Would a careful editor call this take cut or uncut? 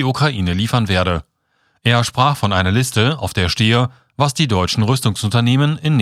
uncut